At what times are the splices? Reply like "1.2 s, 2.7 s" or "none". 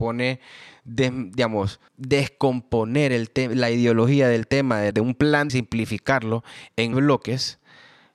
1.9 s, 4.9 s, 5.5 s, 6.9 s